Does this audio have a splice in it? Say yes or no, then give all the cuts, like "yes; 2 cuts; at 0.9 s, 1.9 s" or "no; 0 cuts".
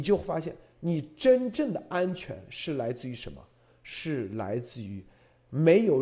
no; 0 cuts